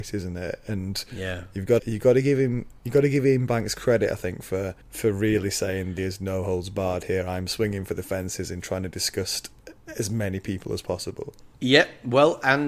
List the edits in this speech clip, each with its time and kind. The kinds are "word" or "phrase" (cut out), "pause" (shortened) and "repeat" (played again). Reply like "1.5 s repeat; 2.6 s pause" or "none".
1.8 s word; 4.8 s pause; 6.0 s word; 9.8 s pause; 11.5 s pause

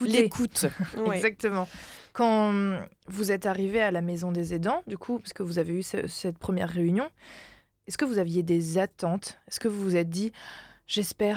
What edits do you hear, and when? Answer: none

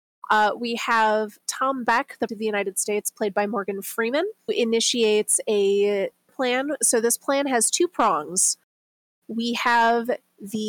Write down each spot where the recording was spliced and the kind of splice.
2.3 s word; 4.5 s word; 6.3 s word

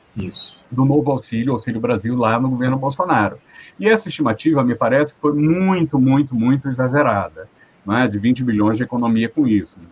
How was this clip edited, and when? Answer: none

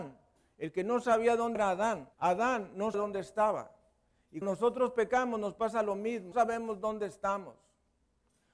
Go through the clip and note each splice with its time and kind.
1.5 s word; 2.1 s pause; 2.9 s word; 4.4 s word; 6.3 s word

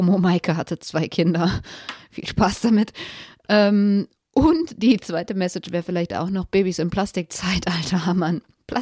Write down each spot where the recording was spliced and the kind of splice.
none

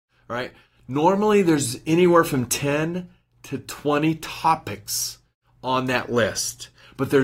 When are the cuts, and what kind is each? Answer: none

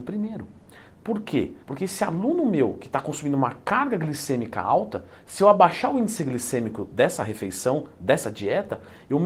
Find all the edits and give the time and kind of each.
1.6 s pause

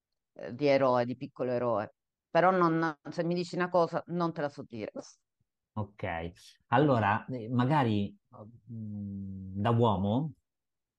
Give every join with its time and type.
8.6 s word

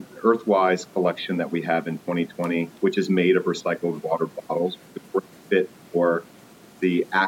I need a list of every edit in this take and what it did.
2.8 s pause

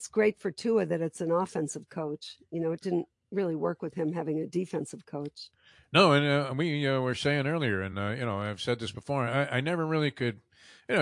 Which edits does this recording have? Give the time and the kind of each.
none

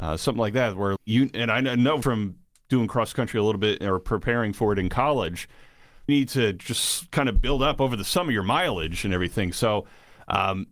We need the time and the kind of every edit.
1.0 s word; 2.0 s word; 6.1 s word

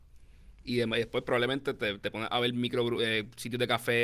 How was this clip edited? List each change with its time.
none

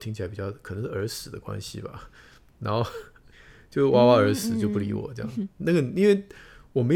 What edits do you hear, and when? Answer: none

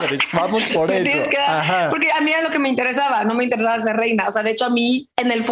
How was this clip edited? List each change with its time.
none

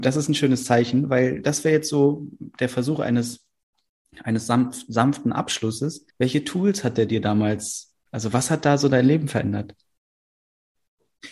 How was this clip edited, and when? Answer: 6.1 s pause

